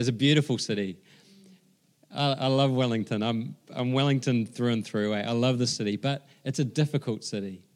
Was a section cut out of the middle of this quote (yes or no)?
no